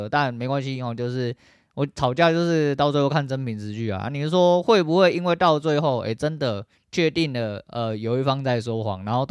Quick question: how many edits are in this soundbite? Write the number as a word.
zero